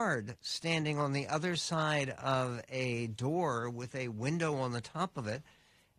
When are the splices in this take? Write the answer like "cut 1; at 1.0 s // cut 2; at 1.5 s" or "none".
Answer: none

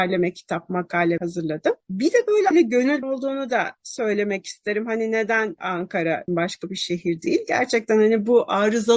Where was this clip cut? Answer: cut 1; at 1.2 s // cut 2; at 2.5 s // cut 3; at 3.0 s // cut 4; at 6.3 s

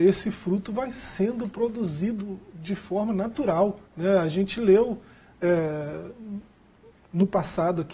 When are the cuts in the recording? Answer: cut 1; at 3.9 s

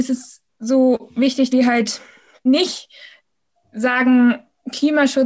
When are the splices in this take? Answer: cut 1; at 1.5 s // cut 2; at 2.5 s

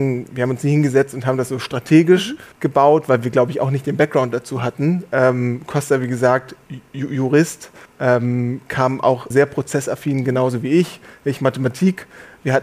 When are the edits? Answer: cut 1; at 2.5 s // cut 2; at 7.9 s // cut 3; at 9.3 s

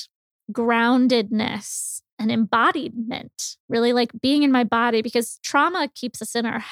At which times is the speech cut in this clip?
cut 1; at 2.1 s // cut 2; at 3.6 s

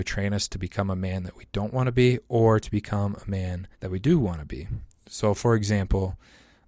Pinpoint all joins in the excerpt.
cut 1; at 3.7 s

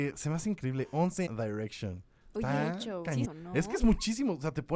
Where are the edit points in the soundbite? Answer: cut 1; at 1.3 s // cut 2; at 3.2 s

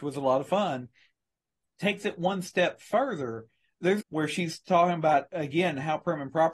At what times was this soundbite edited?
cut 1; at 4.0 s

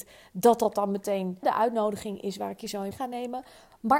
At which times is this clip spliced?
cut 1; at 1.4 s // cut 2; at 2.9 s

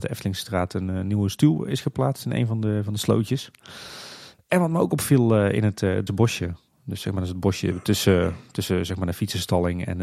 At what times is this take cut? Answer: cut 1; at 6.1 s

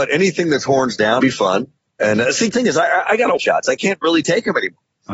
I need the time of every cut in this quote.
cut 1; at 1.2 s // cut 2; at 1.8 s // cut 3; at 2.5 s // cut 4; at 3.4 s

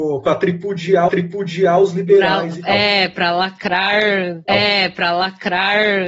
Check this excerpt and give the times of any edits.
cut 1; at 1.1 s // cut 2; at 4.5 s

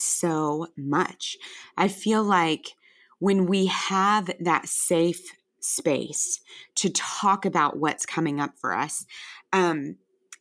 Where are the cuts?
none

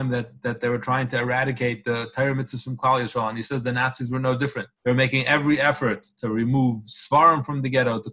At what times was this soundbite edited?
cut 1; at 4.7 s

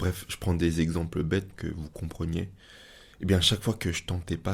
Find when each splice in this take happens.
cut 1; at 1.5 s // cut 2; at 3.1 s

